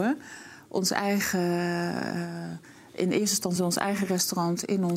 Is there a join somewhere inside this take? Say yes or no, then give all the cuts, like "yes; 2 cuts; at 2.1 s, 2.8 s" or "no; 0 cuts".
no; 0 cuts